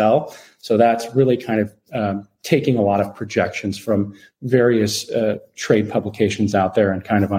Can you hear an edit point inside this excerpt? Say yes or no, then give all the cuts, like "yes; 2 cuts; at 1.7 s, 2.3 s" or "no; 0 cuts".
no; 0 cuts